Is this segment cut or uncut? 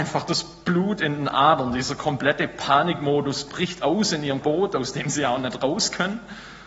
cut